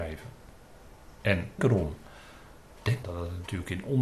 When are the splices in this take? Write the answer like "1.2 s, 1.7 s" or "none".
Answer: 1.6 s, 3.0 s